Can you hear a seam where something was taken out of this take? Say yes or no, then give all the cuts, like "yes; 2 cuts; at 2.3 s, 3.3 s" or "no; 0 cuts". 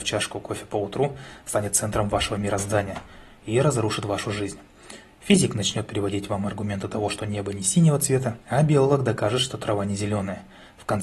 yes; 1 cut; at 8.4 s